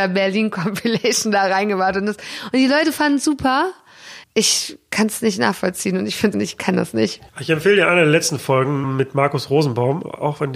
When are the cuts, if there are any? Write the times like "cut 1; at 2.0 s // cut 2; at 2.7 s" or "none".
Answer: cut 1; at 4.2 s // cut 2; at 6.3 s // cut 3; at 7.3 s // cut 4; at 8.8 s